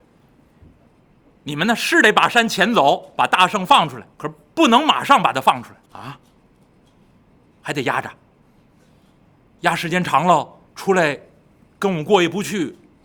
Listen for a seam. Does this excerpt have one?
yes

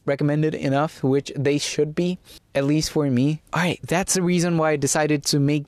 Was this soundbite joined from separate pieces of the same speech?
yes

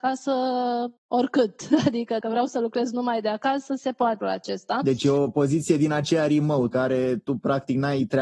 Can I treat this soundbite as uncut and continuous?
no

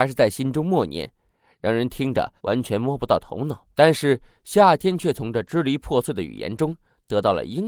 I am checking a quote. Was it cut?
yes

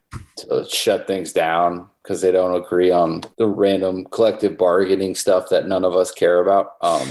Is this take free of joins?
no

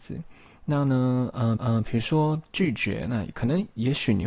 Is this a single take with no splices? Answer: no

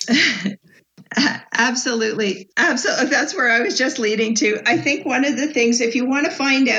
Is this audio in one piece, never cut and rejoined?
no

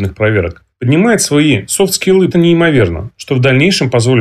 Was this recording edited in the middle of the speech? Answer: yes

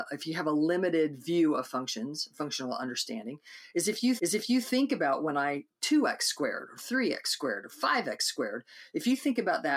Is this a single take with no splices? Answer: no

